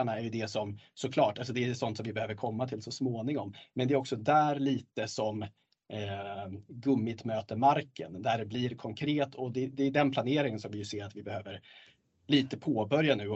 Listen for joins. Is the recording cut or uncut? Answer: uncut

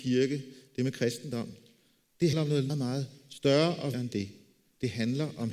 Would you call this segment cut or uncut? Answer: cut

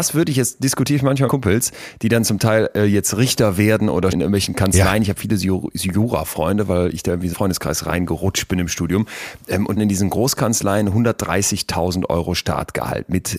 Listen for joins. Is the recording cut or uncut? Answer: cut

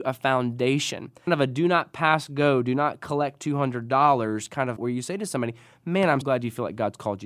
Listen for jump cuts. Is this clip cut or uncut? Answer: cut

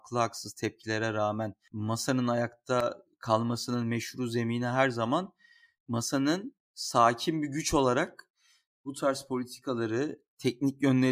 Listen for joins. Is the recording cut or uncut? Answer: uncut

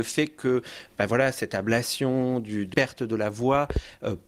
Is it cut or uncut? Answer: cut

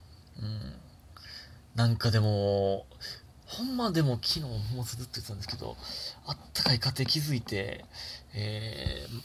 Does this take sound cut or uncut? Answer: uncut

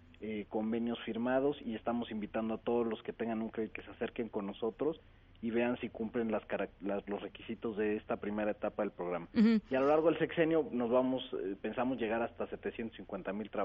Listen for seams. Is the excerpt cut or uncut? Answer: cut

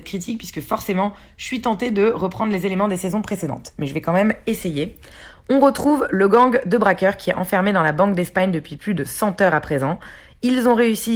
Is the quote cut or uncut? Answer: uncut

